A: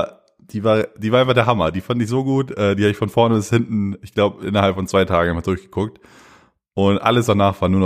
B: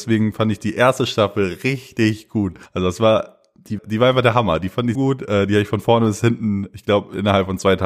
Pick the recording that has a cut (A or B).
B